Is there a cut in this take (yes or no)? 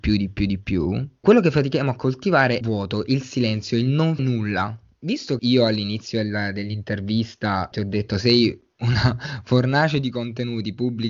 yes